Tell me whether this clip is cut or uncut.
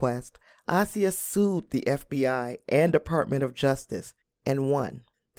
uncut